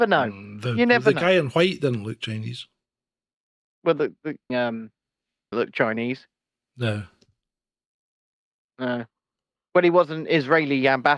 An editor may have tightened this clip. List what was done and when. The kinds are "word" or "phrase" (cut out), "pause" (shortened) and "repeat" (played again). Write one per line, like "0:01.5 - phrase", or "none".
0:04.5 - phrase
0:05.5 - phrase